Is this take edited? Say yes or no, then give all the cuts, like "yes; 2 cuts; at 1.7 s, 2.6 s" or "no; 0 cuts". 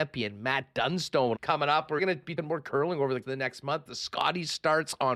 yes; 5 cuts; at 1.3 s, 2.0 s, 2.4 s, 3.2 s, 3.9 s